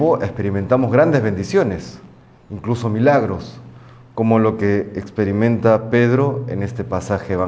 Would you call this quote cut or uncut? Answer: uncut